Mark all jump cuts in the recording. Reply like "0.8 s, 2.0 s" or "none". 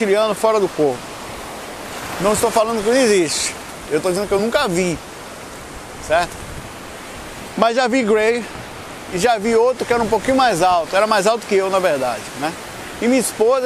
none